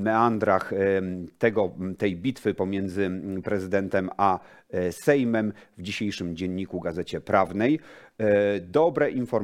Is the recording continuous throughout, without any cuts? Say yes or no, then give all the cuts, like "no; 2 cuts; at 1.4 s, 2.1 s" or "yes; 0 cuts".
yes; 0 cuts